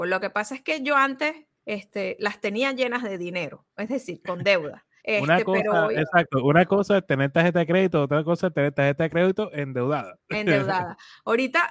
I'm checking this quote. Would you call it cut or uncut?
cut